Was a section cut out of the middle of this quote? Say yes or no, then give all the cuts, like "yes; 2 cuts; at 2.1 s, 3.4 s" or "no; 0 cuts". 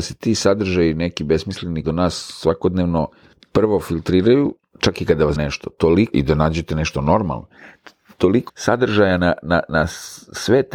yes; 4 cuts; at 1.8 s, 5.4 s, 6.1 s, 8.5 s